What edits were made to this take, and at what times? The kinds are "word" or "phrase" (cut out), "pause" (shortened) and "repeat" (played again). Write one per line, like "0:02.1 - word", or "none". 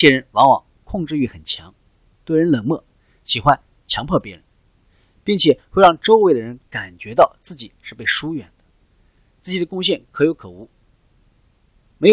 none